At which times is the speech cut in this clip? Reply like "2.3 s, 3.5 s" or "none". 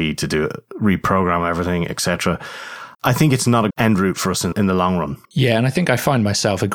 2.9 s, 3.7 s, 4.5 s, 5.2 s